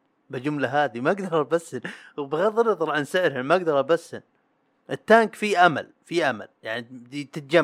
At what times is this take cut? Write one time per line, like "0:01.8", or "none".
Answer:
none